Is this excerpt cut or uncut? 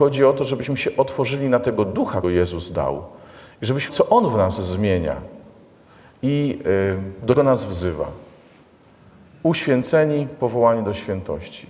cut